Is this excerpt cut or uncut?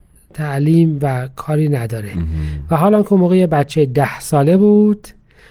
uncut